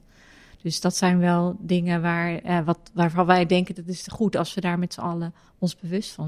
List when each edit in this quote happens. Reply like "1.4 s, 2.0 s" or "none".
none